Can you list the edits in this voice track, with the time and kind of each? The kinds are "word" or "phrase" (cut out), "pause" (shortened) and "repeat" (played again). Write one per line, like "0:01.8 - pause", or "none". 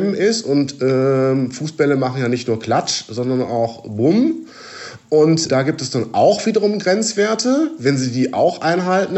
0:05.5 - word